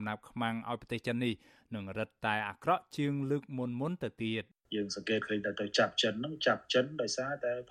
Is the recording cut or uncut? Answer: uncut